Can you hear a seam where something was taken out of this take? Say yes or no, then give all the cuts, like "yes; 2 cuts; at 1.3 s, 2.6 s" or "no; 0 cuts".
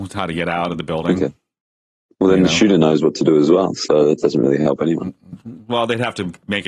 no; 0 cuts